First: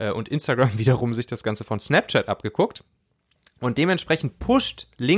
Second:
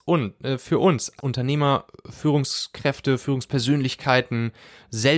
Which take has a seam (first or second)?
second